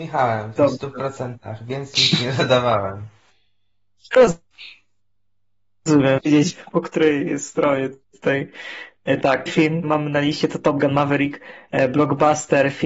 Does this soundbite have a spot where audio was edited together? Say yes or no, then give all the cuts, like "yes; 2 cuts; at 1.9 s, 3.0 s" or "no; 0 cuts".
yes; 5 cuts; at 1.9 s, 6.2 s, 8.0 s, 9.5 s, 9.8 s